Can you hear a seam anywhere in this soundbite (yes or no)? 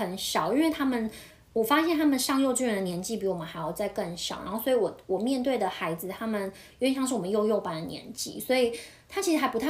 no